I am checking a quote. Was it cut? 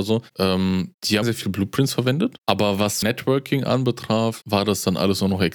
yes; 2 cuts; at 1.2 s, 3.0 s

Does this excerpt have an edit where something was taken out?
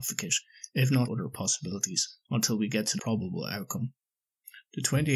yes; 2 cuts; at 1.1 s, 3.0 s

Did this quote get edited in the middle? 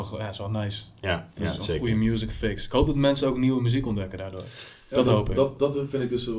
no; 0 cuts

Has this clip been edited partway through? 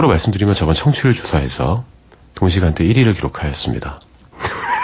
no; 0 cuts

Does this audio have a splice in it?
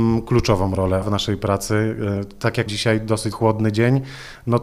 yes; 3 cuts; at 1.0 s, 2.7 s, 3.3 s

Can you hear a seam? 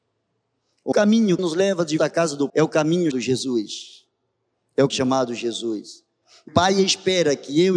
yes; 7 cuts; at 0.9 s, 1.4 s, 2.0 s, 2.5 s, 3.1 s, 4.9 s, 6.5 s

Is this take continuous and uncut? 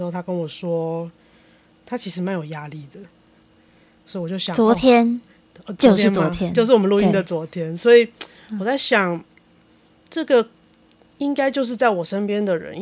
yes; 0 cuts

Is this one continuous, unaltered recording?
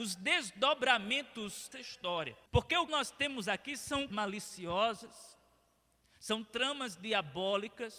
no; 4 cuts; at 1.7 s, 2.5 s, 2.9 s, 4.1 s

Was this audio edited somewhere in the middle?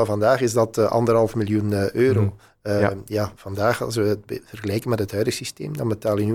no; 0 cuts

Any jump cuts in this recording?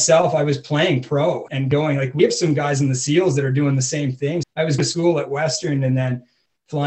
yes; 3 cuts; at 1.5 s, 4.4 s, 4.8 s

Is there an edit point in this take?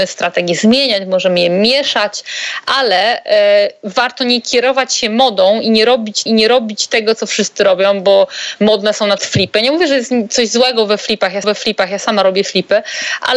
yes; 3 cuts; at 6.3 s, 9.2 s, 11.4 s

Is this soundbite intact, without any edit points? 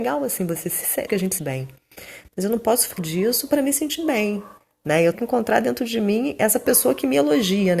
no; 4 cuts; at 1.1 s, 1.4 s, 3.0 s, 5.1 s

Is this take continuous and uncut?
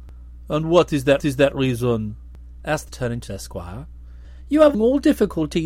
no; 4 cuts; at 1.2 s, 2.9 s, 3.3 s, 4.7 s

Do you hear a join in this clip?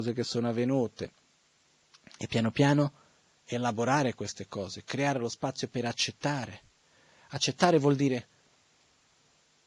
no; 0 cuts

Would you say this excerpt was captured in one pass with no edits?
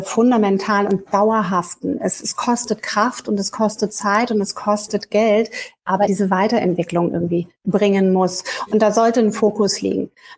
no; 1 cut; at 6.1 s

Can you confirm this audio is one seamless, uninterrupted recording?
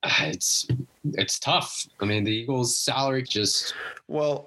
no; 1 cut; at 3.2 s

